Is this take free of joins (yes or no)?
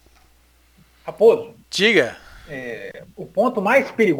no